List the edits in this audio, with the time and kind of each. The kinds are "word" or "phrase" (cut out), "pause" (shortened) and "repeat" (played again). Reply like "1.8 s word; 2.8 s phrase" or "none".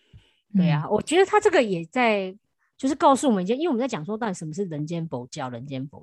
none